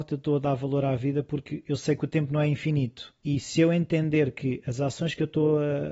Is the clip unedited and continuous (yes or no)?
no